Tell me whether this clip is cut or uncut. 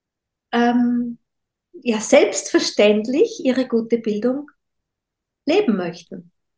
uncut